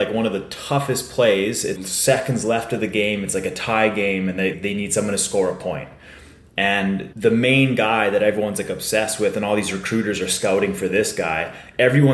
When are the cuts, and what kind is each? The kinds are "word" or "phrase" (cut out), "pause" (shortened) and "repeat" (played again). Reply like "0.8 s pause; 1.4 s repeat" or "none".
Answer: 1.7 s word; 4.5 s word; 7.1 s word